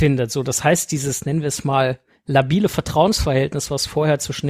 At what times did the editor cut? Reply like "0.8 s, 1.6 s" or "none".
none